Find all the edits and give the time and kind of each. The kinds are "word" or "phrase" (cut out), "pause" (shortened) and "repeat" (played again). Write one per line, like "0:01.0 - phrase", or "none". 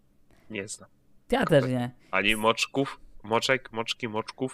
none